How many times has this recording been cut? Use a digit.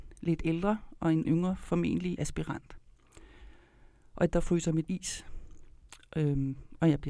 4